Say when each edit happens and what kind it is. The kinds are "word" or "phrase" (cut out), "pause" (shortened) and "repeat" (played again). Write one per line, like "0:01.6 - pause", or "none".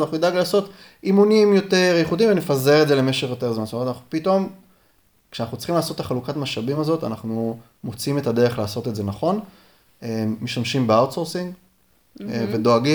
none